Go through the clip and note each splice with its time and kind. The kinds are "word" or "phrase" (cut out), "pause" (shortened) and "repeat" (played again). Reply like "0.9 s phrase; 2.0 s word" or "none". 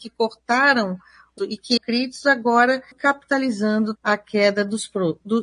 1.4 s word; 1.8 s word; 2.9 s word; 4.0 s word